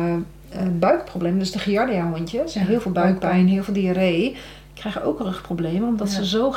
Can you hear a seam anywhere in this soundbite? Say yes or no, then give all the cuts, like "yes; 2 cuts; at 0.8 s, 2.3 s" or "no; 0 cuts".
no; 0 cuts